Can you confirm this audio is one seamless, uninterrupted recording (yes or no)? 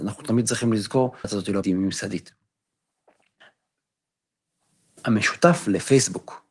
no